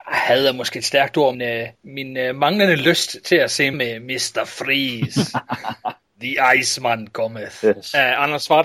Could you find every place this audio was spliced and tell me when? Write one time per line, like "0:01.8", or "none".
0:01.3
0:01.7
0:03.7